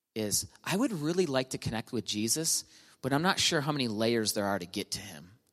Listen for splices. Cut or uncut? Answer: uncut